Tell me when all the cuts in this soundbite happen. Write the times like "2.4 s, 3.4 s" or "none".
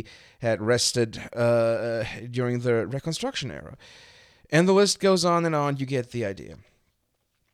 none